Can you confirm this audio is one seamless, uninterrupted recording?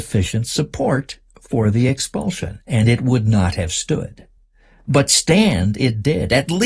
yes; 0 cuts

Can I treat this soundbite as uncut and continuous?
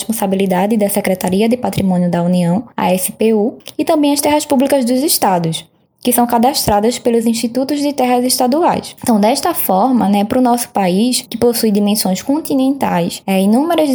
yes; 0 cuts

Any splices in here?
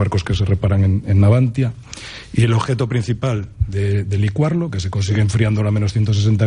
no; 0 cuts

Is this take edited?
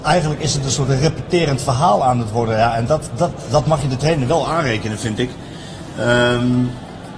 no; 0 cuts

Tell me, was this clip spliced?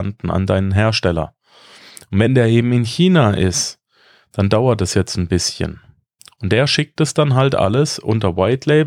no; 0 cuts

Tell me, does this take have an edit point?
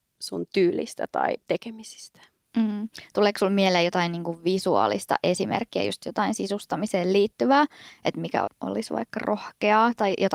yes; 1 cut; at 8.5 s

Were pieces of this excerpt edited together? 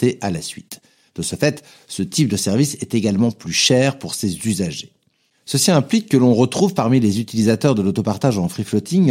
no; 0 cuts

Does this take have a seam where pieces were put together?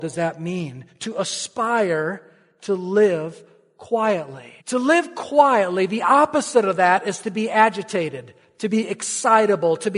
yes; 1 cut; at 4.6 s

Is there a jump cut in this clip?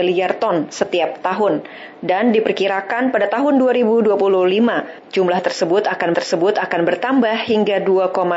yes; 1 cut; at 6.1 s

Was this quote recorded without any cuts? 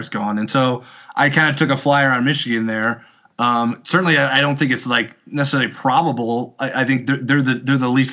yes; 0 cuts

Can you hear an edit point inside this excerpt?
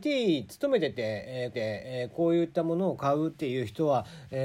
yes; 1 cut; at 1.5 s

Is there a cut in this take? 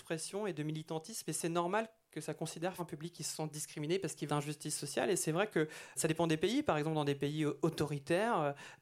yes; 3 cuts; at 2.8 s, 4.3 s, 6.0 s

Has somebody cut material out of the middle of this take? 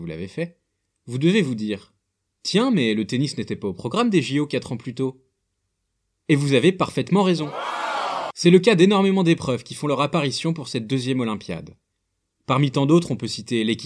no; 0 cuts

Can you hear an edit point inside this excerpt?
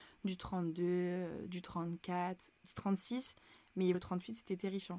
yes; 2 cuts; at 2.6 s, 3.9 s

